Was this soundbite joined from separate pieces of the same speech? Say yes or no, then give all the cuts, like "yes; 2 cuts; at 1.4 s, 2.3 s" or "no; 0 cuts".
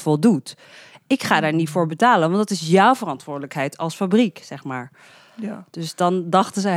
no; 0 cuts